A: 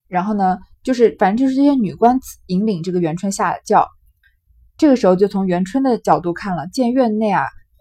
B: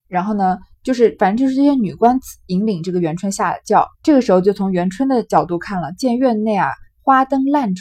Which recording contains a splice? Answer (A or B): B